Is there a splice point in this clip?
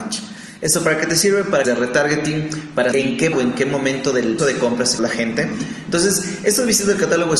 yes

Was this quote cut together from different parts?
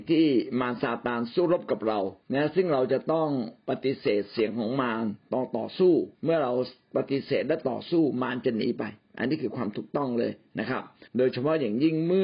yes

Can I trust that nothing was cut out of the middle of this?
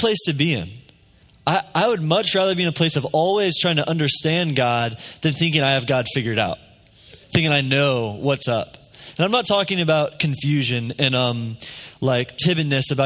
no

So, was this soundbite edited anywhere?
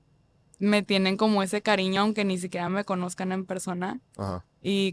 no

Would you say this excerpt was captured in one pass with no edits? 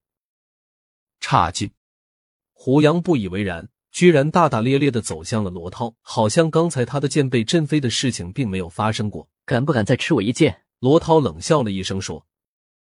no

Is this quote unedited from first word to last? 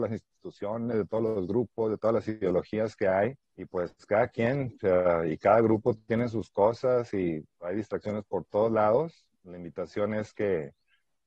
no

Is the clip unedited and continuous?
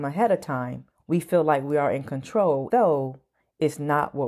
no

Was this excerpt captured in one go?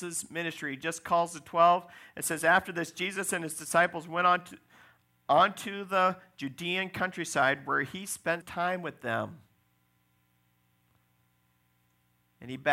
no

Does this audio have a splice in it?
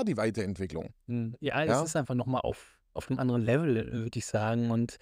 no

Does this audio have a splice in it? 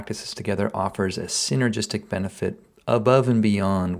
no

